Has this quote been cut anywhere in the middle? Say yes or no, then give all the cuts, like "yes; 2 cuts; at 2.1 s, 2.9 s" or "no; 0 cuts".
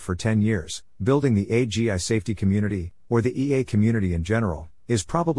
no; 0 cuts